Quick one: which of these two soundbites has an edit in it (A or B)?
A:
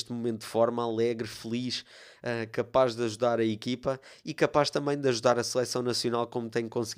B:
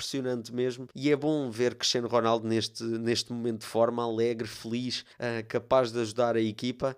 B